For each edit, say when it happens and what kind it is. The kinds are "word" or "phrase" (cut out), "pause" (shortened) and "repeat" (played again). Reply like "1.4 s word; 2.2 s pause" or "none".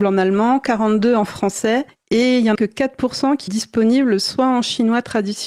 2.5 s word; 3.5 s word